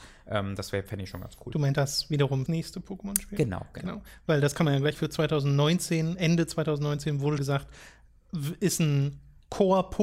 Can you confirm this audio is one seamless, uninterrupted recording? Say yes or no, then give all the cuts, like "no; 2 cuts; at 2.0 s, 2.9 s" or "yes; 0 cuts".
no; 4 cuts; at 1.7 s, 2.5 s, 4.9 s, 7.4 s